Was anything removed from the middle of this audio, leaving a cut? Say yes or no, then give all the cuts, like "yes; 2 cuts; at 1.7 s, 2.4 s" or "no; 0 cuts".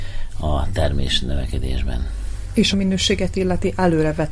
yes; 1 cut; at 2.7 s